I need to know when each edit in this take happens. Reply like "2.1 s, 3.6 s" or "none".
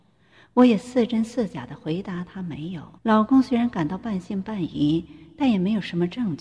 3.0 s